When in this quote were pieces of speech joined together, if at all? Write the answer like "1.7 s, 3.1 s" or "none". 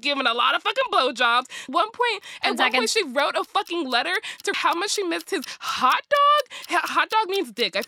1.7 s, 4.5 s